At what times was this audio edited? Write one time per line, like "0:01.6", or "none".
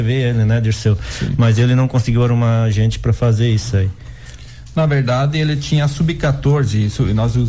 none